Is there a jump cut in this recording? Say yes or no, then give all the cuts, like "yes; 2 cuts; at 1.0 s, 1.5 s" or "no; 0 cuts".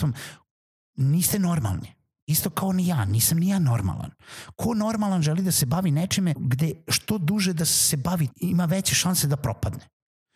yes; 2 cuts; at 6.3 s, 8.3 s